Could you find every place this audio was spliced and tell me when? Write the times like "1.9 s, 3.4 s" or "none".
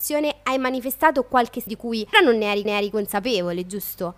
1.7 s, 2.1 s, 2.7 s